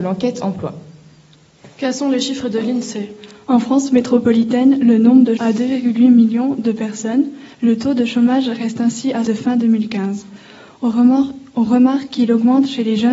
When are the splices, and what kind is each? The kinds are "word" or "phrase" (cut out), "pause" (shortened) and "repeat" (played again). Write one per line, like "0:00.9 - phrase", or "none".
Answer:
0:01.7 - pause
0:05.4 - phrase
0:07.5 - pause
0:09.3 - phrase